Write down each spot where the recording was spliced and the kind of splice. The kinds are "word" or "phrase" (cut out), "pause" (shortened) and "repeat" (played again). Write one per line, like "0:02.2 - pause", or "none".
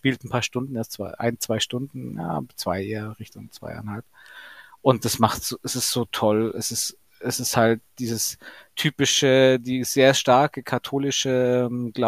none